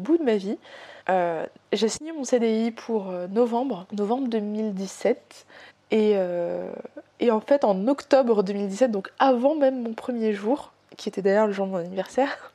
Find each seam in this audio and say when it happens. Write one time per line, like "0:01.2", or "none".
0:01.0
0:05.7